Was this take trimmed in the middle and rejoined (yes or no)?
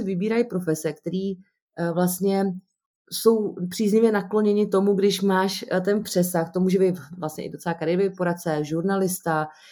yes